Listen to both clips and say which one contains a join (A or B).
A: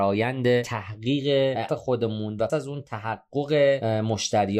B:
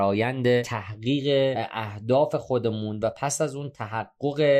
A